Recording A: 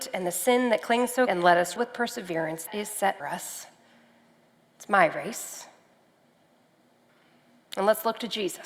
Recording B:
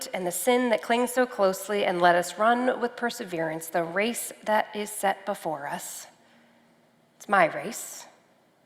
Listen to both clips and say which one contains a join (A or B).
A